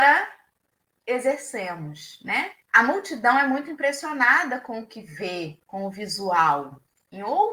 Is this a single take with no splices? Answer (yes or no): no